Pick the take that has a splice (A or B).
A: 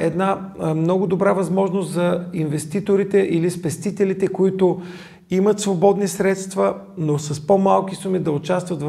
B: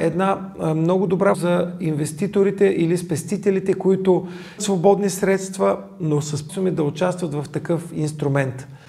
B